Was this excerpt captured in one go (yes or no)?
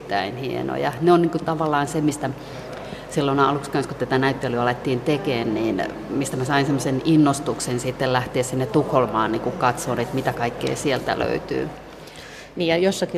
yes